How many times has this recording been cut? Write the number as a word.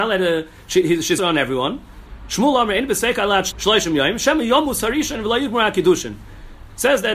two